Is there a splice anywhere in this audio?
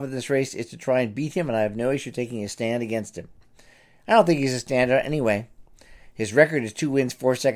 no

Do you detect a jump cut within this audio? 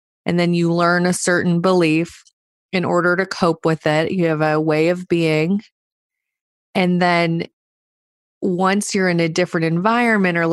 no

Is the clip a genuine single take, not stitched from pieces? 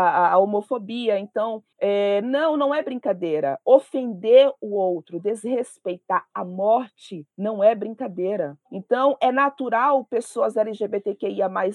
no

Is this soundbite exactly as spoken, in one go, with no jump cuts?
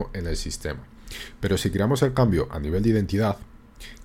yes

